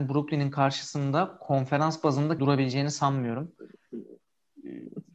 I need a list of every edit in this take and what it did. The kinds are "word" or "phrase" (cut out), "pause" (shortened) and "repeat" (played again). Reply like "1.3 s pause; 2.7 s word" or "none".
2.4 s word